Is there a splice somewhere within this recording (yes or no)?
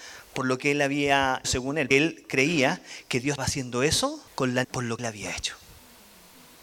yes